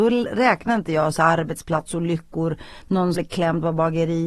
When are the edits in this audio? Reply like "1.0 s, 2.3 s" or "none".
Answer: 3.2 s